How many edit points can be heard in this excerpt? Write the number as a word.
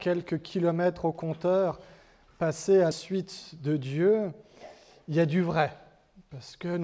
one